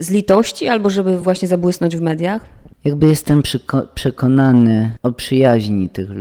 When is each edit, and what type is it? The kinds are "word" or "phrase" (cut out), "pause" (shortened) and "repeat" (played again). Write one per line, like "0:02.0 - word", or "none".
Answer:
none